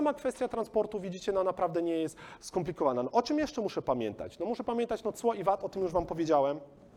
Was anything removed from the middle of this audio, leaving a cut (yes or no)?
no